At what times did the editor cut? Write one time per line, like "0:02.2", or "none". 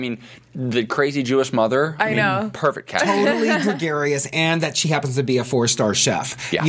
none